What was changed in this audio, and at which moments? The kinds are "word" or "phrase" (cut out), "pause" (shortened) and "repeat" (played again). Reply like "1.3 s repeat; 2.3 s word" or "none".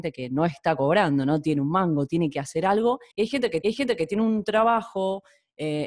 3.1 s pause; 3.6 s repeat